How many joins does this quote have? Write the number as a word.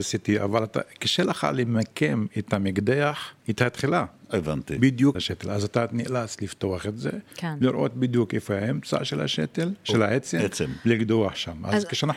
two